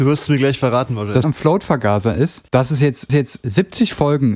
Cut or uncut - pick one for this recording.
cut